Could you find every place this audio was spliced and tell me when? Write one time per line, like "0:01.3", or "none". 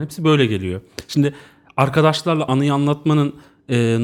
0:02.5